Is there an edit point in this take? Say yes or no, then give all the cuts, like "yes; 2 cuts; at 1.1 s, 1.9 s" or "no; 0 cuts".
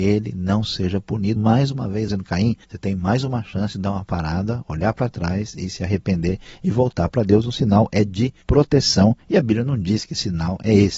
yes; 4 cuts; at 1.4 s, 2.1 s, 2.6 s, 8.4 s